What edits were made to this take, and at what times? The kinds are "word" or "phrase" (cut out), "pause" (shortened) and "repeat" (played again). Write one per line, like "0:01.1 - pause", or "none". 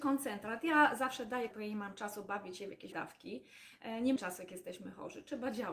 0:01.5 - word
0:02.9 - word
0:04.2 - word